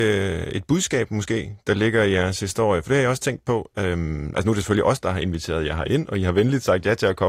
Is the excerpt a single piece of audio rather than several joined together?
yes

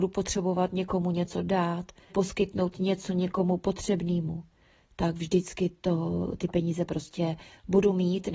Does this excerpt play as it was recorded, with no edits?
no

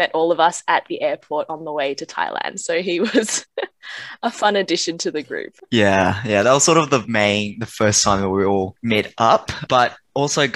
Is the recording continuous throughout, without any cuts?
yes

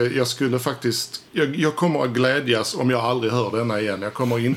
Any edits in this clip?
yes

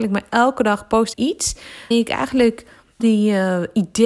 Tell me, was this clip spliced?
yes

